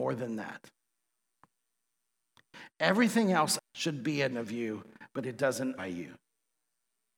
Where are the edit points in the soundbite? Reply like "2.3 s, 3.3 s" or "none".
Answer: 3.7 s, 4.3 s, 5.8 s